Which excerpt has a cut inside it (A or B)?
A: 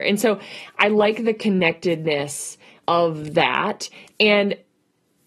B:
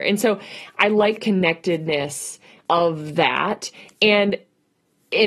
B